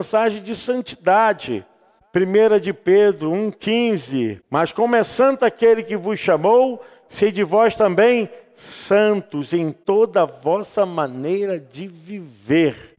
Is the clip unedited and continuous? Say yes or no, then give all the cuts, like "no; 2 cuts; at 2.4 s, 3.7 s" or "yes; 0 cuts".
yes; 0 cuts